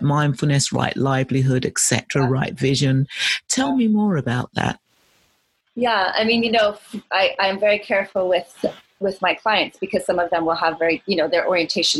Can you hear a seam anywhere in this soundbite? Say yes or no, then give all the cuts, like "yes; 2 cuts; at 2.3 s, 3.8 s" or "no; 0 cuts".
no; 0 cuts